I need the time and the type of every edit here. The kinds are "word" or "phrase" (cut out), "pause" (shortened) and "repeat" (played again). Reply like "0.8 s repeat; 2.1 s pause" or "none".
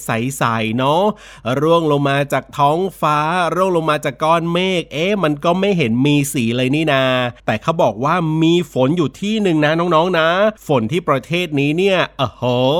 7.4 s pause; 10.6 s pause